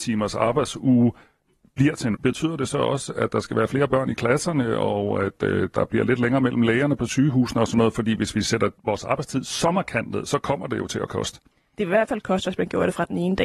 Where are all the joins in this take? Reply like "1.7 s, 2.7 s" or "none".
2.1 s, 8.8 s, 11.5 s